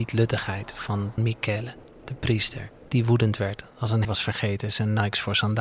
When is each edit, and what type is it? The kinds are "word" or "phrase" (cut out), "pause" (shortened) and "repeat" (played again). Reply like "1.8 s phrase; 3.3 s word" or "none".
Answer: 1.2 s word; 4.0 s word